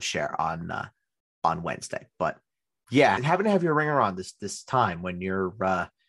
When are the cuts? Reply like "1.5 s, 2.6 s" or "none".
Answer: 3.2 s